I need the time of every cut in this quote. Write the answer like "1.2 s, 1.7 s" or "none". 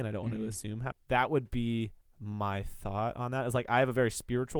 0.9 s, 2.0 s